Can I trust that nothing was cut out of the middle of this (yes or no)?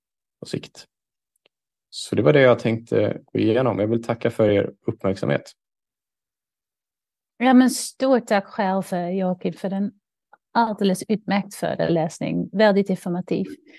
yes